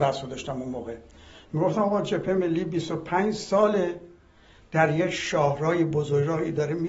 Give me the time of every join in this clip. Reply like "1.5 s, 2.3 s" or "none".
none